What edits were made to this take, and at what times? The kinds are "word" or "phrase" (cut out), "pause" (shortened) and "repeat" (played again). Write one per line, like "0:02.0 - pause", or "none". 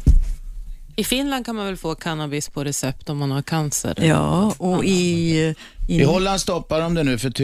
none